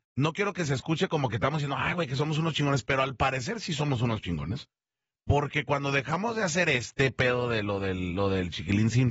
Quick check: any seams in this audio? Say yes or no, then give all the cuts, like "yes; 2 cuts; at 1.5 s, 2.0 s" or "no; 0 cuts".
no; 0 cuts